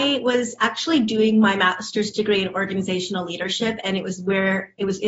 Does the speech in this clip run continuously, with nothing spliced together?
yes; 0 cuts

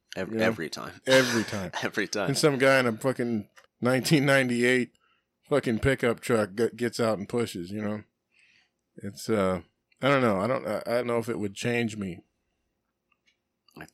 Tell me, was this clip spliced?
yes; 3 cuts; at 3.7 s, 9.8 s, 11.0 s

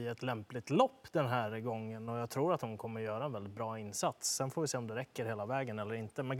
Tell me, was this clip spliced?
no; 0 cuts

